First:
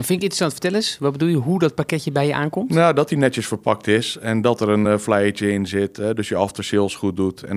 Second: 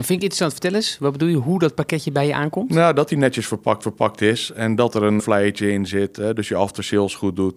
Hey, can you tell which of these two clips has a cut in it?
second; 2 cuts; at 3.8 s, 5.2 s

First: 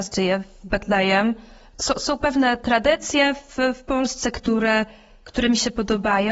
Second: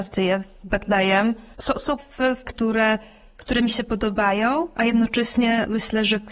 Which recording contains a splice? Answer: second; 3 cuts; at 1.5 s, 2.0 s, 2.4 s

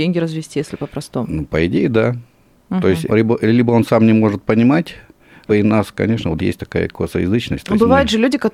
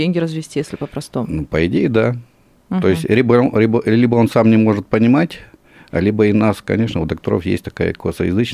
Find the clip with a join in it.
first; 3 cuts; at 3.1 s, 5.5 s, 6.4 s

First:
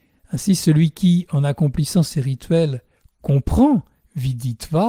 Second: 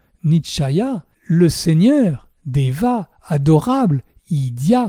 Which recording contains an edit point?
second; 1 cut; at 1.1 s

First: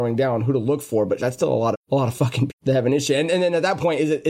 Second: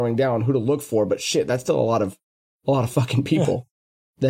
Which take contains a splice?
first; 3 cuts; at 1.2 s, 1.7 s, 2.5 s

